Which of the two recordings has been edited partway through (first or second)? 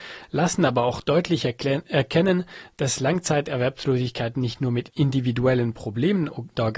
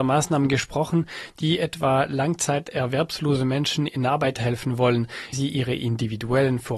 second